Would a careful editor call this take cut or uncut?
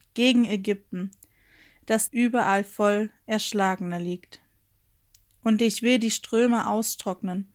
cut